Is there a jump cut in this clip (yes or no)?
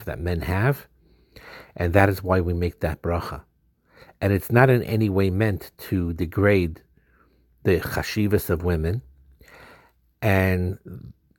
no